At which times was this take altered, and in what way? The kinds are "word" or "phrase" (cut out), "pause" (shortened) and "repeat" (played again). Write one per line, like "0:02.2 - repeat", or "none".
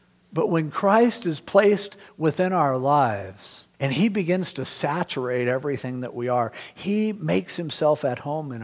0:03.7 - pause